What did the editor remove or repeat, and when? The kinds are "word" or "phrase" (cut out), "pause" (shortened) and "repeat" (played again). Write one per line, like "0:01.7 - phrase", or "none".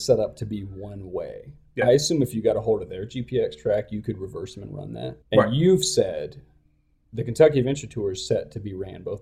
0:05.2 - pause